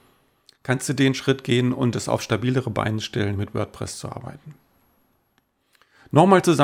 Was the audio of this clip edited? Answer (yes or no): no